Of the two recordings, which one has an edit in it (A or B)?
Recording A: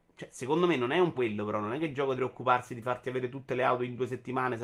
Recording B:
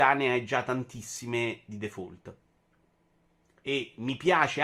A